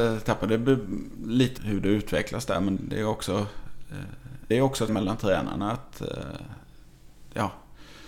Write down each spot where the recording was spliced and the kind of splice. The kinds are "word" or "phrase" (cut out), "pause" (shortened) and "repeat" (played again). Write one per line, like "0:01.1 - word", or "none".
0:01.6 - word
0:02.8 - word
0:04.5 - word
0:04.9 - word